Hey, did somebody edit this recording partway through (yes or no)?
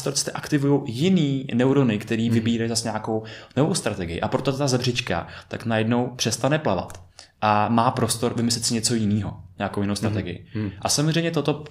no